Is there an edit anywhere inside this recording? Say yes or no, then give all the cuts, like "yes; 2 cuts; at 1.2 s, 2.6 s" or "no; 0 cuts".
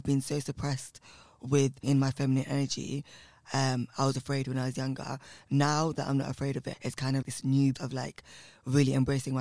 yes; 5 cuts; at 1.8 s, 4.1 s, 6.7 s, 7.2 s, 7.7 s